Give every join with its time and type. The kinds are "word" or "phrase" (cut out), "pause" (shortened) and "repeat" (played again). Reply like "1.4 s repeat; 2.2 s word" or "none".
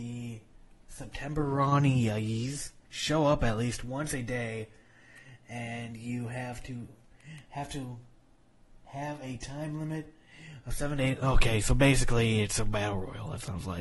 2.8 s pause